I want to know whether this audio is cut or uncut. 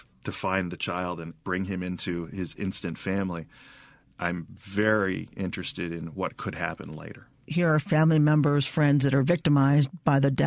uncut